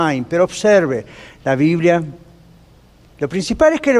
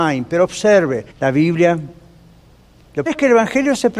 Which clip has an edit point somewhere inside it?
second; 2 cuts; at 1.1 s, 3.1 s

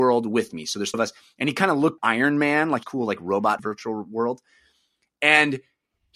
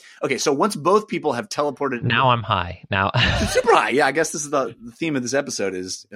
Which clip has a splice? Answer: first; 4 cuts; at 0.9 s, 2.0 s, 2.8 s, 3.6 s

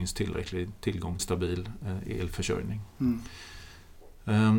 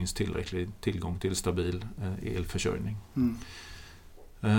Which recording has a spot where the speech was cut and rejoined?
first; 1 cut; at 1.2 s

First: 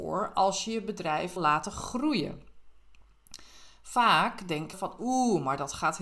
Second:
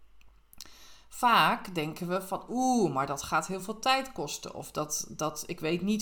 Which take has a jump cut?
first; 2 cuts; at 1.4 s, 4.7 s

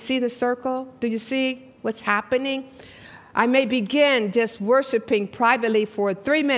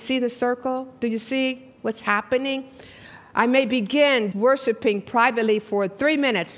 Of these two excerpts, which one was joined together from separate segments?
second; 1 cut; at 4.3 s

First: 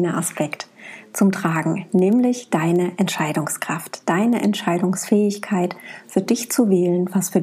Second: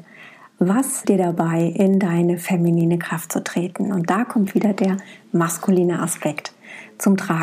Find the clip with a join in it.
second; 1 cut; at 1.0 s

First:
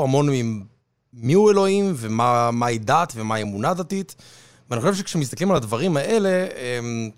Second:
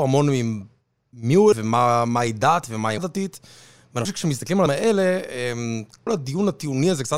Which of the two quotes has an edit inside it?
second; 5 cuts; at 1.5 s, 3.0 s, 4.1 s, 4.7 s, 6.1 s

